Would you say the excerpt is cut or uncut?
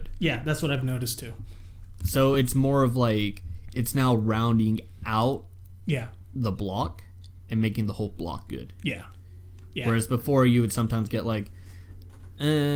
uncut